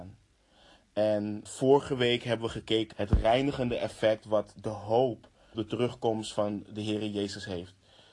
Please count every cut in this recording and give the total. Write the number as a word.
three